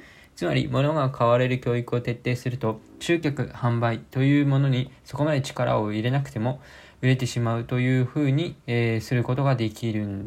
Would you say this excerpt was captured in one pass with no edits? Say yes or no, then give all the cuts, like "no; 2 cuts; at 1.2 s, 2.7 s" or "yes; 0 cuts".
no; 1 cut; at 8.6 s